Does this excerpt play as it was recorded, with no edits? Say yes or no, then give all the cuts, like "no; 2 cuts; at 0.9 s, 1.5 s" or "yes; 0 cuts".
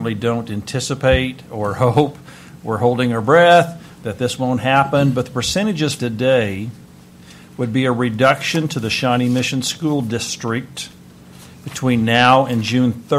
no; 1 cut; at 6.0 s